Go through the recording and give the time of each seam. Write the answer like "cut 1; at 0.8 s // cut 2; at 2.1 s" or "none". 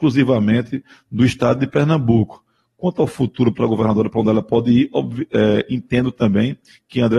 none